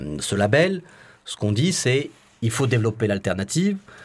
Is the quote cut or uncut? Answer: uncut